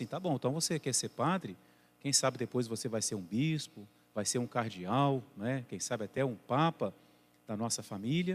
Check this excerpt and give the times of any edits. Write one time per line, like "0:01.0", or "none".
none